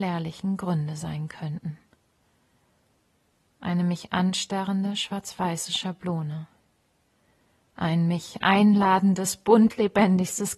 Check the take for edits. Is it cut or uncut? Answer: uncut